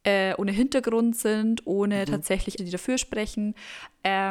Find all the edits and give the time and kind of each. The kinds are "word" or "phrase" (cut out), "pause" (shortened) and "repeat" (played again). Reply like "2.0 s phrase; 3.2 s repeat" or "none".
2.6 s word